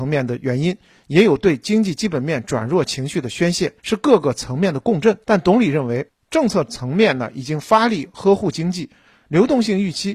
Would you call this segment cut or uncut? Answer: cut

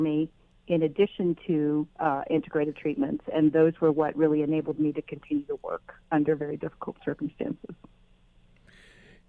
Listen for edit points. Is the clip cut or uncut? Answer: cut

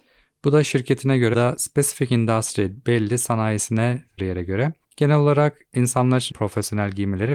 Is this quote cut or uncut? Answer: cut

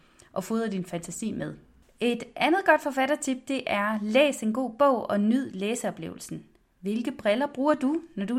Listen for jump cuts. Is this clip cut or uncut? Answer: uncut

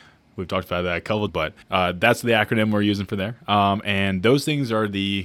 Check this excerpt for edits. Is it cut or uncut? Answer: cut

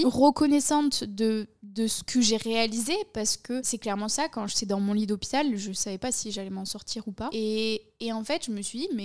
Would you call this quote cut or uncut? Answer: uncut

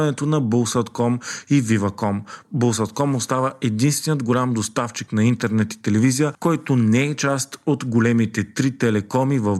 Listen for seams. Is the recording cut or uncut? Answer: uncut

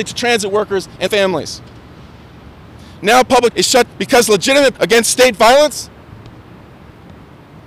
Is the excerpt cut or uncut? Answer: cut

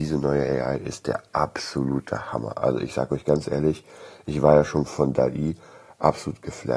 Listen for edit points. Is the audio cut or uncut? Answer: uncut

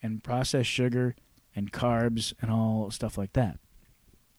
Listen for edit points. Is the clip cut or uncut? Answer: uncut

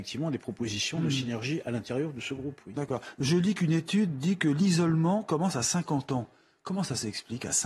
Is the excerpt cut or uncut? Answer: uncut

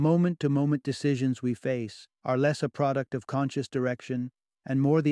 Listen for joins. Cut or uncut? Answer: cut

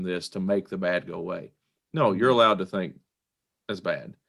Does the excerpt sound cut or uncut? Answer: uncut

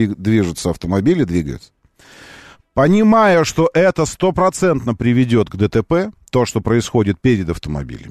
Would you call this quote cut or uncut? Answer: uncut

